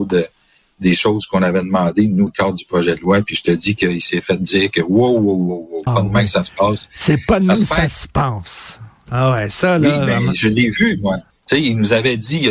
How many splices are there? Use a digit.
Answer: 4